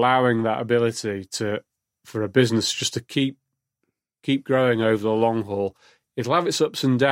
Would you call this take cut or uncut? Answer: uncut